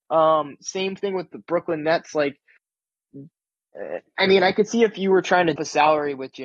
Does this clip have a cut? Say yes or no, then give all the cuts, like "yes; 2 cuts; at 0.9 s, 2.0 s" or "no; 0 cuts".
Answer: yes; 1 cut; at 5.6 s